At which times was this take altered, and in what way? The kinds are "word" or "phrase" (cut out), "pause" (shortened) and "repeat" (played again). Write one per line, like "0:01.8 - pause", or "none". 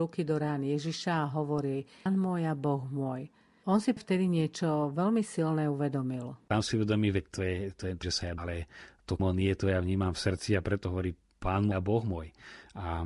0:02.1 - word
0:04.0 - word
0:08.0 - word
0:08.4 - word
0:09.2 - word
0:11.7 - word